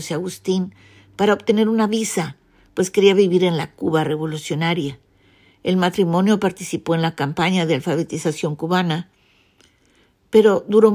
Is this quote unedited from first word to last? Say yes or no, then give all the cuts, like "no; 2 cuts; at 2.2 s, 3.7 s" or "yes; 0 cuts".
yes; 0 cuts